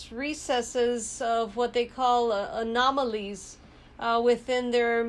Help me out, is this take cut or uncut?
uncut